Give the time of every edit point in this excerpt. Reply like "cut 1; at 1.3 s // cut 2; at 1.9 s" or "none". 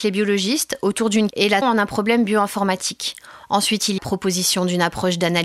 cut 1; at 1.3 s // cut 2; at 1.6 s // cut 3; at 4.0 s

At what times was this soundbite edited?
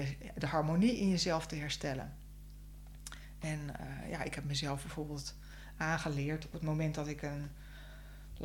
cut 1; at 6.5 s

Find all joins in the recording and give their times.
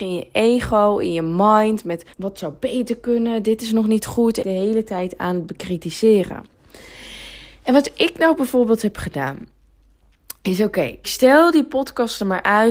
cut 1; at 2.1 s // cut 2; at 4.4 s // cut 3; at 11.0 s

